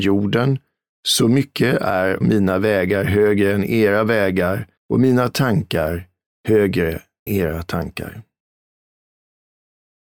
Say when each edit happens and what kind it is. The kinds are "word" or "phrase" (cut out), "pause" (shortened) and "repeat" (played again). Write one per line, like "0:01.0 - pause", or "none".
0:02.2 - word
0:04.8 - pause
0:07.3 - word